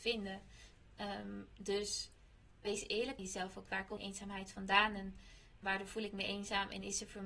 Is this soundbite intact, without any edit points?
no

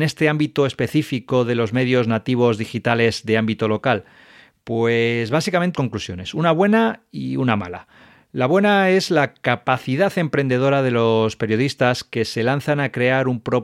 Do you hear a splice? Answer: yes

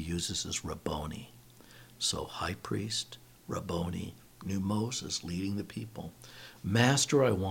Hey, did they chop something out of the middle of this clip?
no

